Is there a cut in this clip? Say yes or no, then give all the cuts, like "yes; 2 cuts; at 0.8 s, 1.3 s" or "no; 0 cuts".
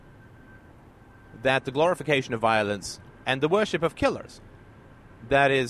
no; 0 cuts